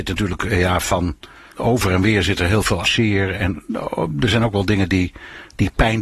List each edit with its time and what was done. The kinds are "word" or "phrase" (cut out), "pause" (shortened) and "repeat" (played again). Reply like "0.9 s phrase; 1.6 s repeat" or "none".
1.5 s word; 2.8 s word